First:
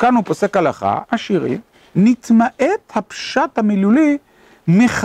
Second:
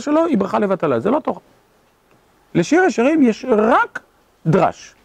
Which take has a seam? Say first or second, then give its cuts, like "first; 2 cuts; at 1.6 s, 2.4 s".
first; 2 cuts; at 1.0 s, 1.7 s